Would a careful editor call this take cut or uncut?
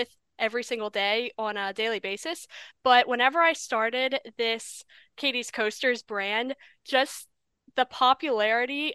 uncut